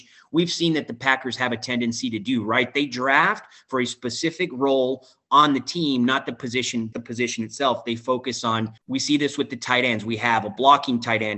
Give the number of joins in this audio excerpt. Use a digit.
2